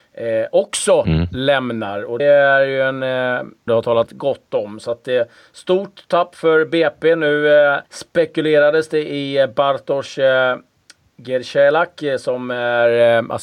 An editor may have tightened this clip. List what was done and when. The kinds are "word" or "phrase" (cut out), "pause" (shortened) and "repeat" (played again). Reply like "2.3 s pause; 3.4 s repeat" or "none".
2.2 s word; 3.7 s phrase; 4.1 s word; 7.9 s pause